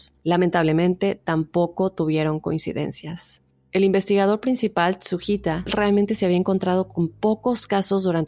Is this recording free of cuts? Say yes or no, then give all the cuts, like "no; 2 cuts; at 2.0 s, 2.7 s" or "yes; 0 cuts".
yes; 0 cuts